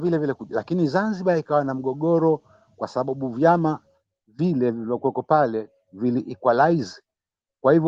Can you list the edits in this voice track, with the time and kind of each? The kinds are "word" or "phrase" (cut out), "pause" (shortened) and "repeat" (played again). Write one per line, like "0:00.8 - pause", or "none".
none